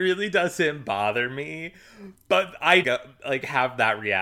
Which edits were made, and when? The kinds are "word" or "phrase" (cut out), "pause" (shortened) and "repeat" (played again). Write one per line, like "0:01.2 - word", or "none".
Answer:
0:02.8 - word

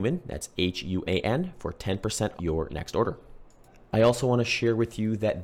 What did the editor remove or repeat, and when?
0:01.1 - word
0:02.4 - word
0:03.7 - pause

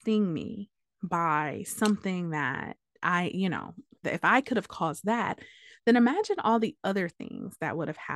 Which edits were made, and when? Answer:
0:04.0 - word

